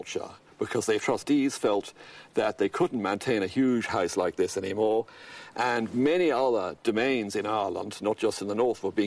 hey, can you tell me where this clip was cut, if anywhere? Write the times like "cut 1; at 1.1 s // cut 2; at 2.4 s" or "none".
cut 1; at 1.0 s